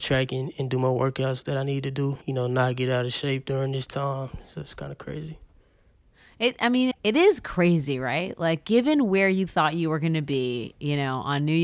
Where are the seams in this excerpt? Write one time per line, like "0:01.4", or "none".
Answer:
0:02.2
0:06.9